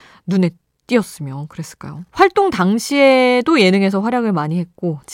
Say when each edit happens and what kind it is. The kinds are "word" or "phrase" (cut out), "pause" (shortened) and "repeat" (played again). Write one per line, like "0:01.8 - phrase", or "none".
0:02.1 - pause